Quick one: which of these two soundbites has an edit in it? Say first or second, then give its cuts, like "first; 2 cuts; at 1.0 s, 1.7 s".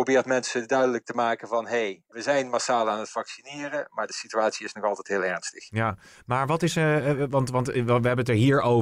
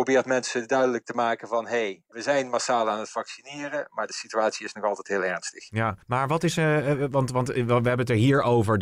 second; 1 cut; at 6.0 s